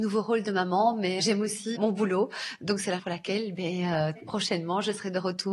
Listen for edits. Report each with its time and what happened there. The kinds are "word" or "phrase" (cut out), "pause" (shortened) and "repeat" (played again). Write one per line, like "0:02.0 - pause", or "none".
0:01.2 - word
0:01.7 - word
0:03.0 - word
0:04.2 - word